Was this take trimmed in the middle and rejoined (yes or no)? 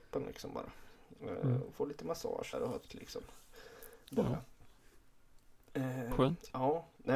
yes